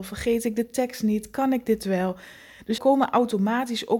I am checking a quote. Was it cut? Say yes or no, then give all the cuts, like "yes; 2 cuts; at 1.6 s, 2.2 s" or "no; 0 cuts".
yes; 1 cut; at 2.8 s